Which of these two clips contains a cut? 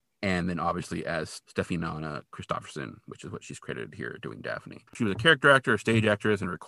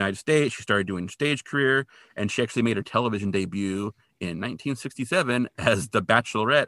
first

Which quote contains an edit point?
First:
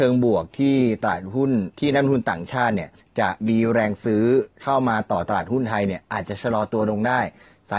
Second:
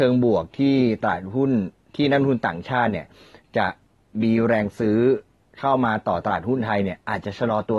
first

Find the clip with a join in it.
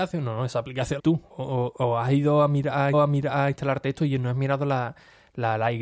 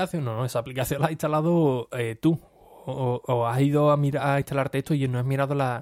first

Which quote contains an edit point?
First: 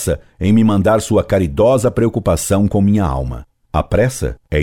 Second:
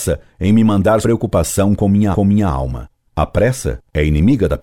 second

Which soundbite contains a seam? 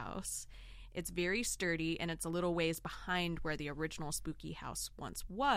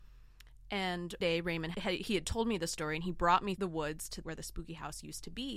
second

